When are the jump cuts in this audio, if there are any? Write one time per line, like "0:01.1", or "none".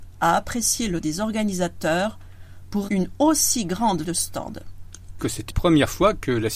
0:01.0
0:02.9
0:04.0
0:05.2
0:05.5